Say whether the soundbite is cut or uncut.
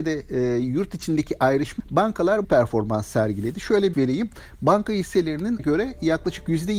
cut